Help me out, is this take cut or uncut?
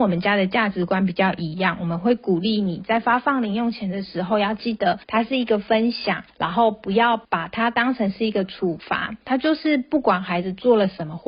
cut